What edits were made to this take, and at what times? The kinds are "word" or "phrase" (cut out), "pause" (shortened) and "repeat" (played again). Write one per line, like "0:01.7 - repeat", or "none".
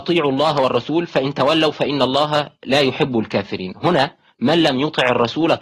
none